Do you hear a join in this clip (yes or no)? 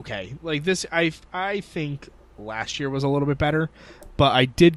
no